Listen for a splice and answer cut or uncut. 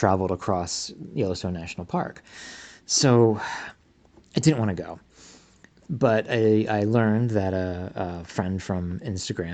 uncut